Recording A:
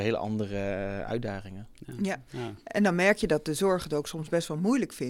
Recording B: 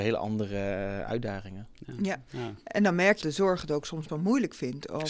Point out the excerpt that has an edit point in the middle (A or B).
B